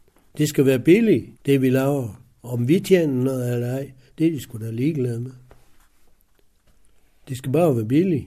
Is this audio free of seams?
no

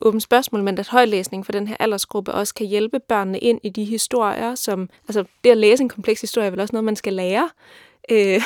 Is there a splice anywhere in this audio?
yes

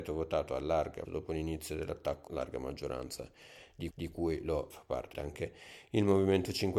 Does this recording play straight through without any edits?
no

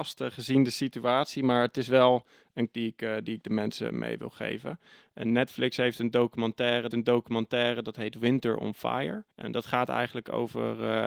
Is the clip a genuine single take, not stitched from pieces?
no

